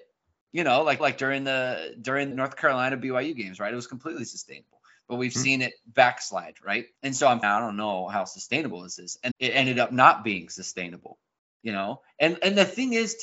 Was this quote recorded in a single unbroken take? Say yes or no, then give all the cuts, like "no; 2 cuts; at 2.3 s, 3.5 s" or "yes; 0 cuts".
no; 6 cuts; at 1.0 s, 2.3 s, 7.0 s, 7.4 s, 9.3 s, 11.4 s